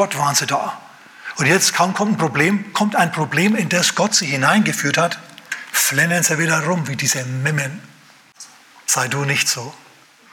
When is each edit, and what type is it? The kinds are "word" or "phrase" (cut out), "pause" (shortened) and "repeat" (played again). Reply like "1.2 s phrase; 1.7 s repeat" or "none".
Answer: none